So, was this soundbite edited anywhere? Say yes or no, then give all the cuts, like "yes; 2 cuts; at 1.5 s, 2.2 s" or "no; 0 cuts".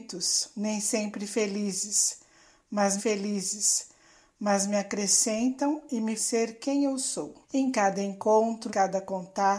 yes; 4 cuts; at 3.0 s, 6.2 s, 7.4 s, 8.7 s